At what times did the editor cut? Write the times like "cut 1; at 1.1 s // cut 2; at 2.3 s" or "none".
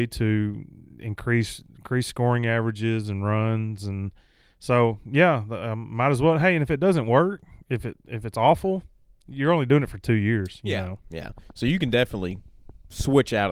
none